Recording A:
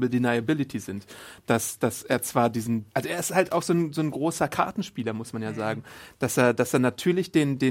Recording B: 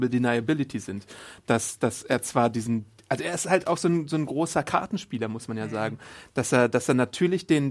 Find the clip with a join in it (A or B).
A